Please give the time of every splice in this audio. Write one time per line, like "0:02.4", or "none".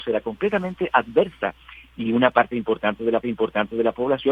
0:03.2